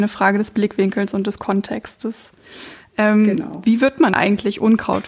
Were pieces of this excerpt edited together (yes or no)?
yes